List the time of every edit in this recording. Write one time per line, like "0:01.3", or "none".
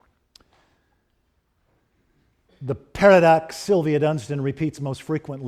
none